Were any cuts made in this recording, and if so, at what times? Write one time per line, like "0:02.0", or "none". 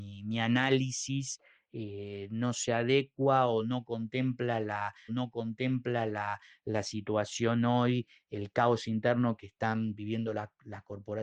0:05.1

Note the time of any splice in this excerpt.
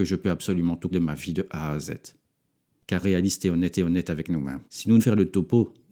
0:00.9
0:03.0
0:03.7
0:04.6
0:05.0

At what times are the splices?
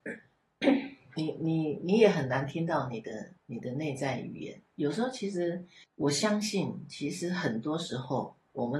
0:03.4
0:05.8

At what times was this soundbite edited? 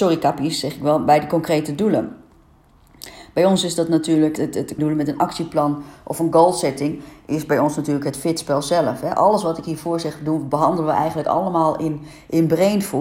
0:04.4
0:04.8

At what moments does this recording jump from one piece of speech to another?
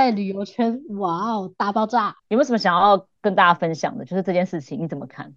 0:02.2

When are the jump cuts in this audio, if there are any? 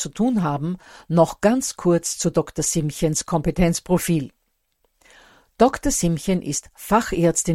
none

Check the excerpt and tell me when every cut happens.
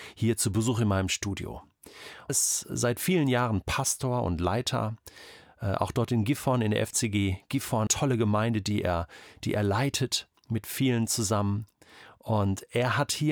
0:02.3
0:07.9

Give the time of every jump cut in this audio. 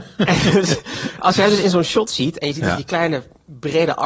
none

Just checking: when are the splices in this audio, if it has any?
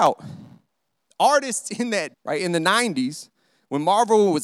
0:02.1

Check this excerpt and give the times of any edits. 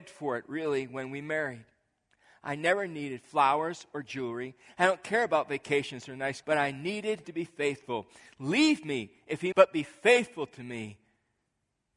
0:06.4
0:07.2
0:09.5

